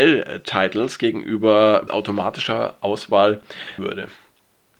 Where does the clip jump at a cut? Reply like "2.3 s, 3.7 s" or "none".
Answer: 1.9 s, 3.8 s